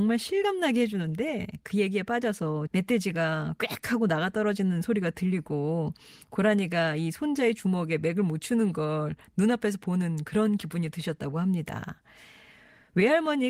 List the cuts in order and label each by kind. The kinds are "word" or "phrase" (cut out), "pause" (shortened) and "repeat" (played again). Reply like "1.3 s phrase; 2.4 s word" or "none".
2.7 s word